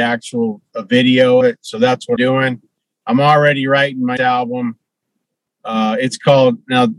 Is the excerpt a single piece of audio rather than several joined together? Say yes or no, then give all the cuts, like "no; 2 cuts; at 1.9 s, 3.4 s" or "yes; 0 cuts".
no; 3 cuts; at 1.4 s, 2.2 s, 4.2 s